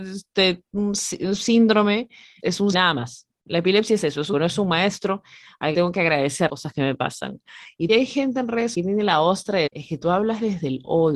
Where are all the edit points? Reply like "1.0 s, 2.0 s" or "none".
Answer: 2.4 s, 2.7 s, 4.3 s, 5.7 s, 6.5 s, 7.9 s, 8.7 s, 9.7 s